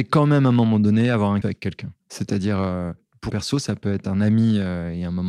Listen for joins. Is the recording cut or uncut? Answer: cut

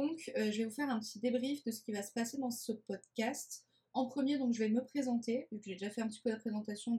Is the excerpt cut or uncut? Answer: uncut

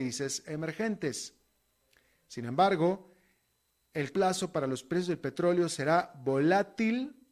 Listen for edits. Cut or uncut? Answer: cut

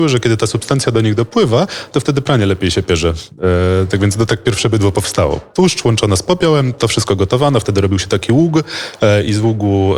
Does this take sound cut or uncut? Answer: uncut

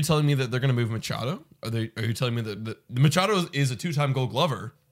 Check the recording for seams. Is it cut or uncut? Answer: uncut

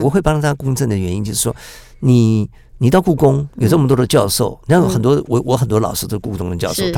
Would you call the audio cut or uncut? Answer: uncut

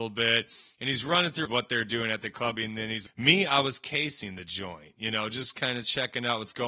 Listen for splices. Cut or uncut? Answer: cut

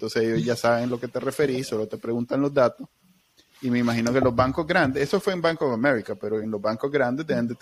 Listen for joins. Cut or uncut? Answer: uncut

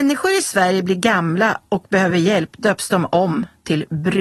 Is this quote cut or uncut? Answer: uncut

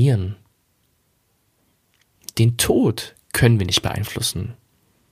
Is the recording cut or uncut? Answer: uncut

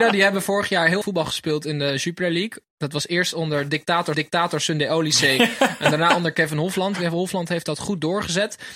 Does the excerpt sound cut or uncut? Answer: cut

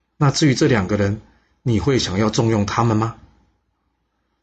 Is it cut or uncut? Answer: uncut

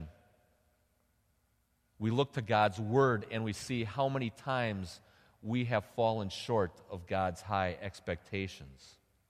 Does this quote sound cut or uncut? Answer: uncut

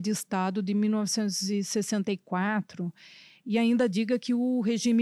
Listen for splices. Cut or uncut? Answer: uncut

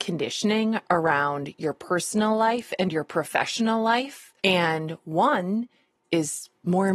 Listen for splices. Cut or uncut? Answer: cut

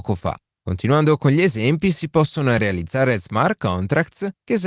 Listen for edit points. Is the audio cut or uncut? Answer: uncut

